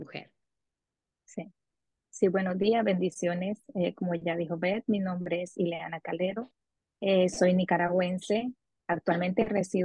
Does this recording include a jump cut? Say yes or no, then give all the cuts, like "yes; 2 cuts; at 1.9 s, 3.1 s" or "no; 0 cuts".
no; 0 cuts